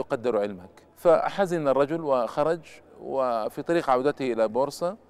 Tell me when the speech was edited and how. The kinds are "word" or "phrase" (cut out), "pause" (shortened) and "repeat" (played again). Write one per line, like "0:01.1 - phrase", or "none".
0:00.9 - pause